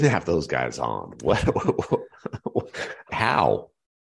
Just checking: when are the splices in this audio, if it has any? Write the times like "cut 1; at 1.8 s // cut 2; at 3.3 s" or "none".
cut 1; at 3.1 s